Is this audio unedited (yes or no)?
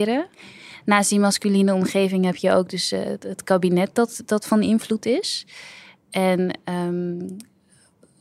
yes